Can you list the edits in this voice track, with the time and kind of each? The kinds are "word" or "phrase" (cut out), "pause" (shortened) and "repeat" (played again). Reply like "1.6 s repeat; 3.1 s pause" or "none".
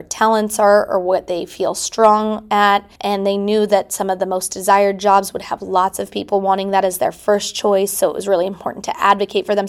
3.0 s pause